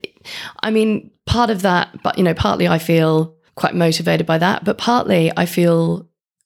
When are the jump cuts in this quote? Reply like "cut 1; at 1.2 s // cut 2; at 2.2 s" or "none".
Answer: cut 1; at 3.5 s